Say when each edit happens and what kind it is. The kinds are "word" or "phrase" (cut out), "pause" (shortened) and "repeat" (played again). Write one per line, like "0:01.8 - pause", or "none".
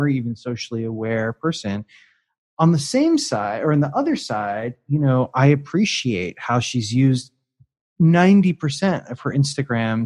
none